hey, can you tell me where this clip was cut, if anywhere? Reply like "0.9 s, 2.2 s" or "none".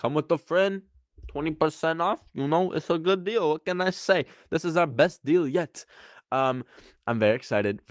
none